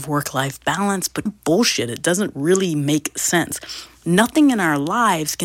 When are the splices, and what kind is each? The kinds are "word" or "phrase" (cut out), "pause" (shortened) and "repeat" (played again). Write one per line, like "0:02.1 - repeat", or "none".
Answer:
0:01.3 - phrase